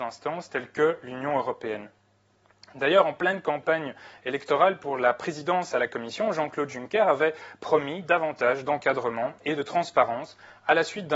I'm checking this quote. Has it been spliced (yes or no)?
no